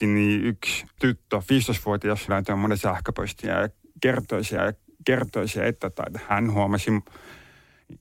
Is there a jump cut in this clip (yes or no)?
yes